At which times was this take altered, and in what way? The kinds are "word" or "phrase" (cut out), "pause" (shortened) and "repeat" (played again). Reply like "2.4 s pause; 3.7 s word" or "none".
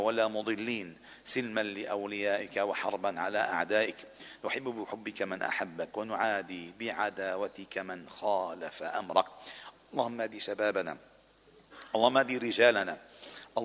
none